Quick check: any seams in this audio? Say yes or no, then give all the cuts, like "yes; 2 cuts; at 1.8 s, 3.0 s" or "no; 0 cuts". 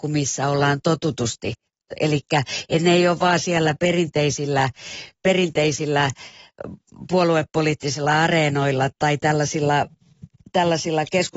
yes; 1 cut; at 8.9 s